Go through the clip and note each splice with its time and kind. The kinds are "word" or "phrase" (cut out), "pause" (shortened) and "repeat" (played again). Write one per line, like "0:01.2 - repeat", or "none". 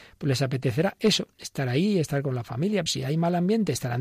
0:02.9 - word

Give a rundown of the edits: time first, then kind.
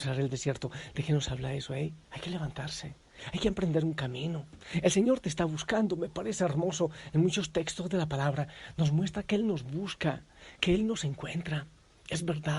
0:02.0 - pause

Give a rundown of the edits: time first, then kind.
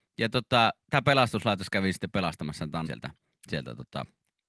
0:02.9 - word

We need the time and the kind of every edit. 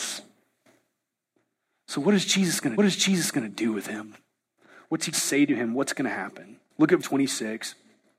0:02.8 - repeat
0:05.1 - word
0:06.7 - pause
0:07.0 - word

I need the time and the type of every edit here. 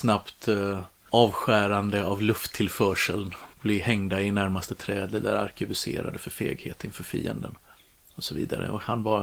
0:03.5 - pause

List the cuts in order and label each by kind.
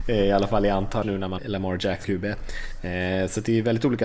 0:01.0 - word
0:01.4 - word
0:02.0 - word

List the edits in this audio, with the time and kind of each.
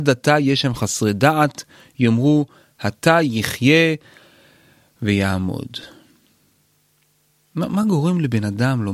none

